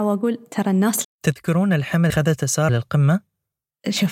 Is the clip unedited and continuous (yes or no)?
no